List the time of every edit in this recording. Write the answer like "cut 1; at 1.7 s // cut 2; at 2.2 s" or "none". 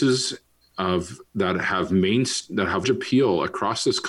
cut 1; at 2.8 s